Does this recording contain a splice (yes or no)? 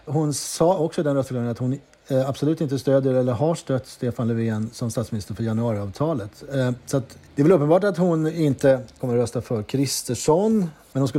no